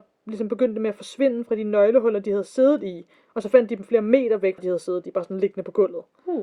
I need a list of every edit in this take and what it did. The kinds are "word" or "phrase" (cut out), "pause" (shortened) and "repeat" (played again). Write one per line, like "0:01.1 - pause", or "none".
0:04.6 - phrase